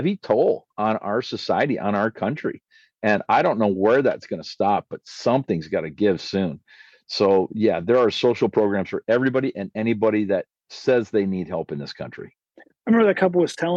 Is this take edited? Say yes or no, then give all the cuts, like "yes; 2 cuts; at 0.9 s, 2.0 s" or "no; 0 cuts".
no; 0 cuts